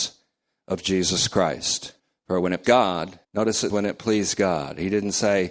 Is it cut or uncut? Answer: cut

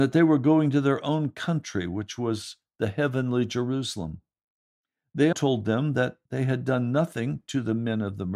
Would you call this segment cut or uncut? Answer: cut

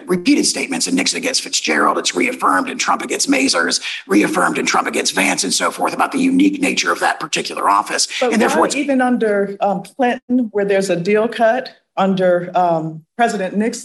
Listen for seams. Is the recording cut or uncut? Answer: uncut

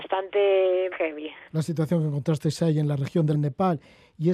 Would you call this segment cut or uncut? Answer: cut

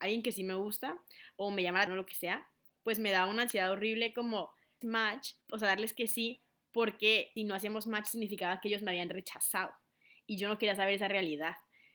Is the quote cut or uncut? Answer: cut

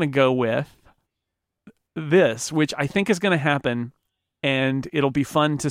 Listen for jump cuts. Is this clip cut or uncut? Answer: uncut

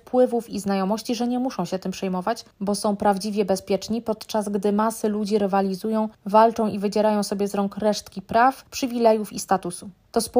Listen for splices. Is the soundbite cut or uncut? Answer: uncut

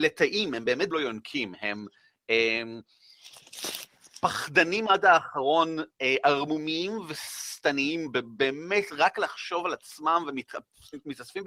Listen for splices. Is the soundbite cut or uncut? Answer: cut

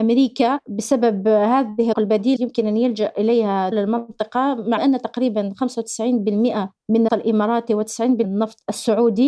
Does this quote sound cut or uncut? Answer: cut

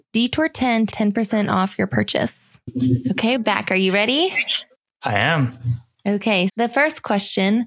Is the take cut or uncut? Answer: cut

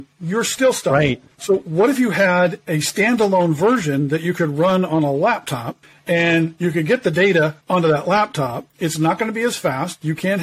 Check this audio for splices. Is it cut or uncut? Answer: cut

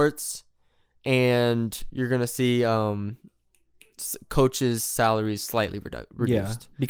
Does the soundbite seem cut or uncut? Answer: uncut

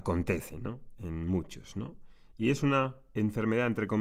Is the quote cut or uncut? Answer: uncut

